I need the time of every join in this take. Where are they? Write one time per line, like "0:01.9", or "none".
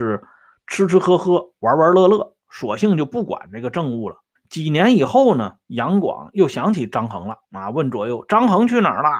0:04.4
0:07.4